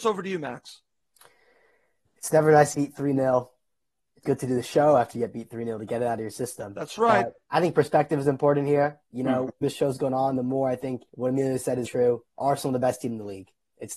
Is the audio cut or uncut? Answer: cut